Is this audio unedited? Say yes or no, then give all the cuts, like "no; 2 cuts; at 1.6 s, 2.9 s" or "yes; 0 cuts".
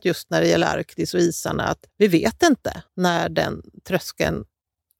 no; 2 cuts; at 1.9 s, 2.9 s